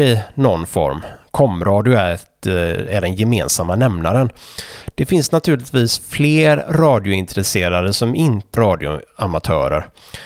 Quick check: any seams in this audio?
yes; 1 cut; at 8.6 s

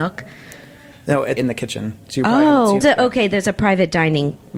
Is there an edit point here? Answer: yes; 2 cuts; at 1.4 s, 2.8 s

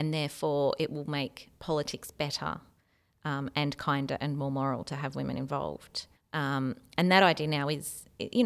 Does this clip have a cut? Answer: yes; 1 cut; at 6.2 s

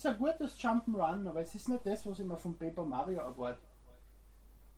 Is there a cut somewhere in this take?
no; 0 cuts

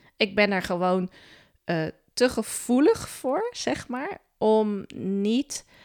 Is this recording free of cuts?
yes; 0 cuts

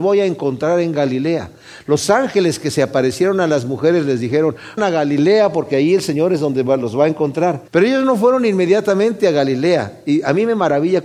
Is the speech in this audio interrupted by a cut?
yes; 2 cuts; at 4.8 s, 7.7 s

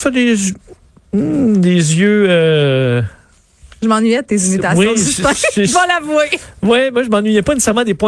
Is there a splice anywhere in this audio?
no; 0 cuts

